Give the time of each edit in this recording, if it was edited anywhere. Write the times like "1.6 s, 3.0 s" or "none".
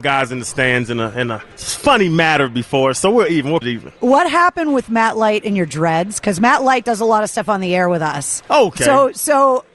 1.5 s, 3.6 s, 4.0 s